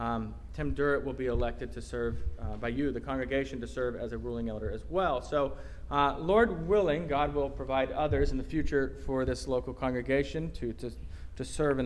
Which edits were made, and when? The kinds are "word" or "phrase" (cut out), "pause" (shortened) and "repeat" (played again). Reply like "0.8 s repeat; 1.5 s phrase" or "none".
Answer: none